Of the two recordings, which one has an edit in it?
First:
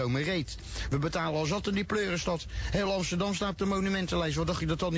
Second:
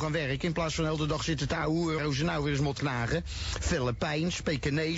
second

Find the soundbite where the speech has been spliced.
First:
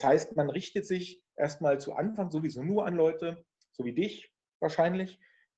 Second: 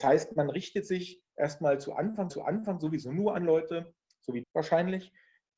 second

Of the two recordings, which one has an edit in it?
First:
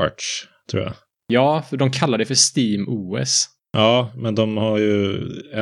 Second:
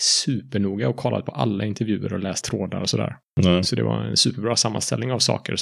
second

